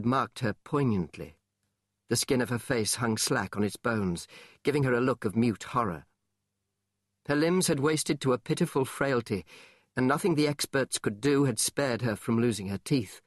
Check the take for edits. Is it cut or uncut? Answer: uncut